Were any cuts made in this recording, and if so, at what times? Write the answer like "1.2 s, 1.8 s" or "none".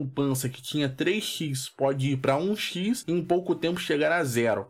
none